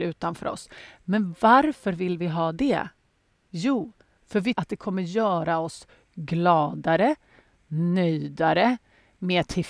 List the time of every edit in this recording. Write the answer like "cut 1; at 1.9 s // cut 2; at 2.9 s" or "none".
cut 1; at 4.5 s